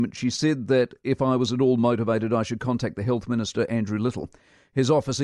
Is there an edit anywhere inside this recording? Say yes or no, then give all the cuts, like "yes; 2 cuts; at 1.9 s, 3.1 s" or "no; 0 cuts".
no; 0 cuts